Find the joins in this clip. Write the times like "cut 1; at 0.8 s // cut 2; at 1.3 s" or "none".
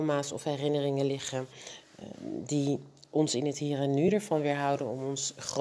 none